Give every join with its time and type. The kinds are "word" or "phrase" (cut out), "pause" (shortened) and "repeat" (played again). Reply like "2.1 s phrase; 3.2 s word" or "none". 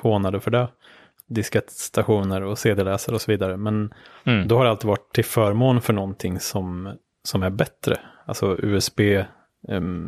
none